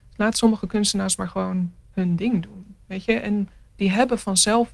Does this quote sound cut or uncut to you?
uncut